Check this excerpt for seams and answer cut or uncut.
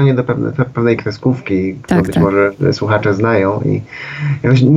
uncut